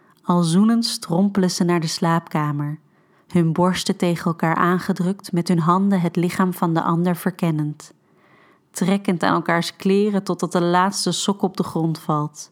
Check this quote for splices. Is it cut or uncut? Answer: uncut